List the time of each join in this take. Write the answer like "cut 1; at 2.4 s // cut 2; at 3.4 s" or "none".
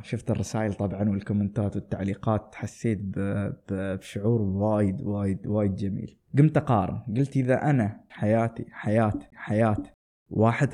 cut 1; at 6.3 s // cut 2; at 8.1 s // cut 3; at 9.3 s